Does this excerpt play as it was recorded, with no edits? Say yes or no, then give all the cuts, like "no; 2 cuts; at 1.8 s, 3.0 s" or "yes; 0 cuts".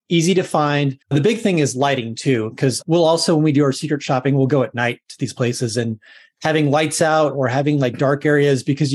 no; 1 cut; at 1.0 s